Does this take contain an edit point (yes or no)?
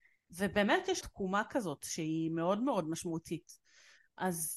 yes